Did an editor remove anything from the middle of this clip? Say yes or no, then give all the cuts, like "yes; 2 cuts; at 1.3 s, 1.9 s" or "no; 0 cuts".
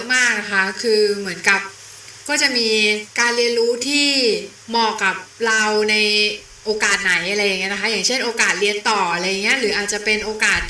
yes; 2 cuts; at 3.1 s, 5.3 s